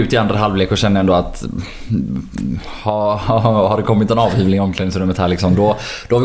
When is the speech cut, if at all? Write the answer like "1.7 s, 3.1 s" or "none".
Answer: none